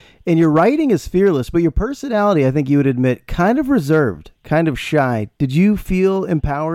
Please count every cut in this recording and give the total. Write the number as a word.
zero